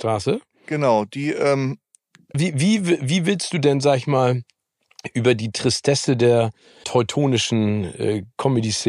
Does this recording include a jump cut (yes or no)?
yes